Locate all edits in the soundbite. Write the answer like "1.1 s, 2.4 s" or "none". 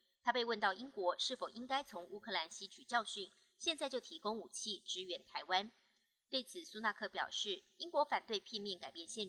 none